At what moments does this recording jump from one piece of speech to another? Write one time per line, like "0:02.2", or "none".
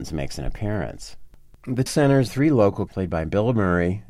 0:01.9
0:02.3
0:02.9